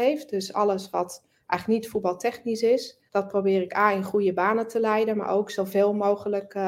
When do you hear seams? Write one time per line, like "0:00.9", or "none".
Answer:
0:03.1